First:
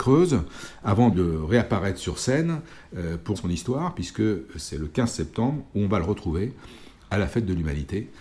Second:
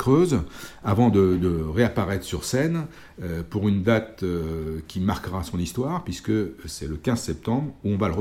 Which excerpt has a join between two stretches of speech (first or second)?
first